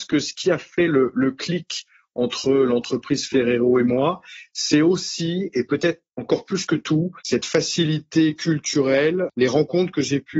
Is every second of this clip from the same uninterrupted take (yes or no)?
no